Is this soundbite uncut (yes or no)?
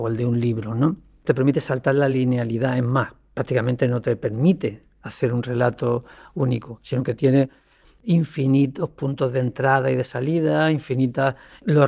yes